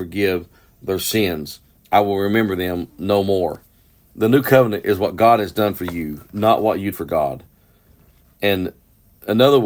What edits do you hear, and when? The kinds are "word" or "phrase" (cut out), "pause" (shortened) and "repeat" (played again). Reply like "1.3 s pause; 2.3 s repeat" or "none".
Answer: 6.9 s word

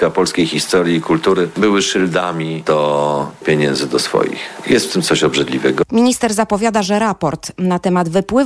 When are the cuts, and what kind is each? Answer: 3.4 s word

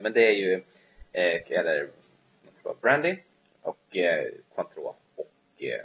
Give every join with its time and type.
1.4 s word

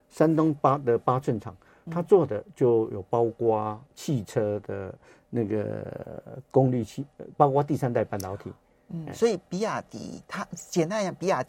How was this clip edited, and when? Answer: 3.9 s pause; 7.3 s phrase

